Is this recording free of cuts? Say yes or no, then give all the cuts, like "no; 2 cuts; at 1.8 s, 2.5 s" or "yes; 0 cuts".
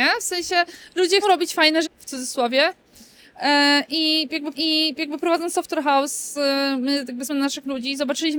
no; 4 cuts; at 1.2 s, 1.8 s, 4.5 s, 7.3 s